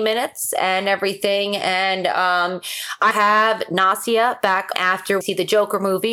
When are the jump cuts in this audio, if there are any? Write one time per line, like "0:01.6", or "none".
0:03.1
0:04.7
0:05.2